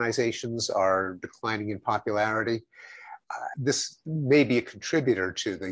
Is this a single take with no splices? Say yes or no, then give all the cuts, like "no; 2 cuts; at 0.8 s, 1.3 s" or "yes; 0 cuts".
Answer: no; 1 cut; at 3.5 s